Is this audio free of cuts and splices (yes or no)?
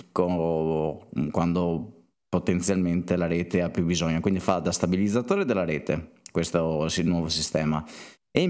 yes